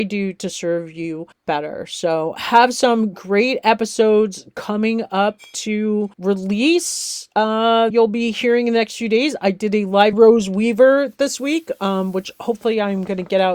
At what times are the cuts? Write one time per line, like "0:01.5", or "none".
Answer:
0:01.3
0:06.1
0:07.9
0:10.1